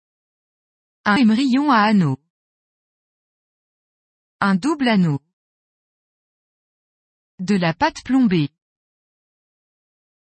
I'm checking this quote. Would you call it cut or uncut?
cut